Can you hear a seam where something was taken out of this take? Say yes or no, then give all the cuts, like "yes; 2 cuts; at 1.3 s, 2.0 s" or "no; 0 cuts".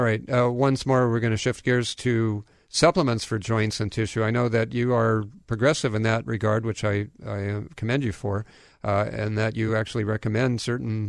no; 0 cuts